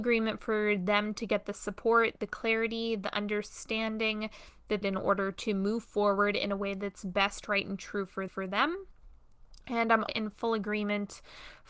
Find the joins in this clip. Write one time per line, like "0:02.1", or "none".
0:04.8
0:08.3
0:10.1